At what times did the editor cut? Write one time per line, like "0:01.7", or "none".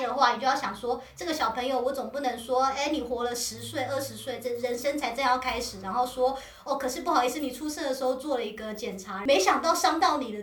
none